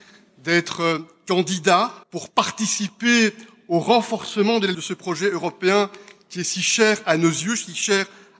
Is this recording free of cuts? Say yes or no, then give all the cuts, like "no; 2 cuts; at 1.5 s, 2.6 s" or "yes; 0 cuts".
no; 2 cuts; at 2.0 s, 4.7 s